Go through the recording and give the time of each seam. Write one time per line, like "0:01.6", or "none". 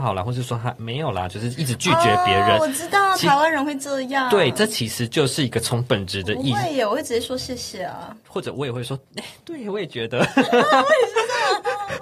none